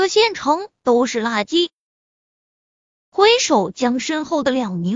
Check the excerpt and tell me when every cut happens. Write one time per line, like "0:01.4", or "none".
none